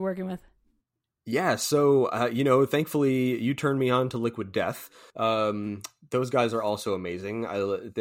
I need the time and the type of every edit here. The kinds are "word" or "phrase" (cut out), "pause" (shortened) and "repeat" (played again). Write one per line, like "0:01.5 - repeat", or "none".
0:05.1 - pause